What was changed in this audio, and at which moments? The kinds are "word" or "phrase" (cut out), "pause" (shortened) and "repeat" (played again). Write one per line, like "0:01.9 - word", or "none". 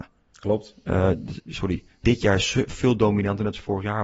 0:02.0 - word